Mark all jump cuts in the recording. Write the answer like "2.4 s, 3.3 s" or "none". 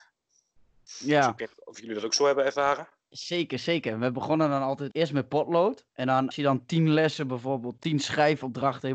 1.5 s, 4.9 s, 5.9 s, 6.3 s